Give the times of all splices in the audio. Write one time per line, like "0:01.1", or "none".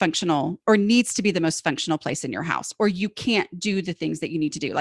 none